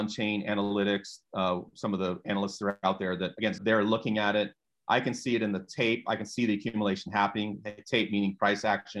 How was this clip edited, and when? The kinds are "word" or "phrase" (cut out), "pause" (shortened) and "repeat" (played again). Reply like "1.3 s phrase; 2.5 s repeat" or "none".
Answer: 3.6 s phrase